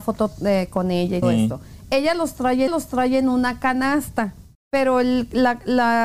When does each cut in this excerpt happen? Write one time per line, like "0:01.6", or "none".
0:01.2
0:02.7
0:04.5